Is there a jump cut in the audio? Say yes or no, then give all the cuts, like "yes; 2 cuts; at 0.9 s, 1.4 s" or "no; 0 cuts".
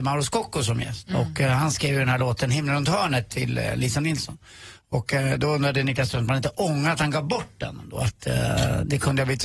no; 0 cuts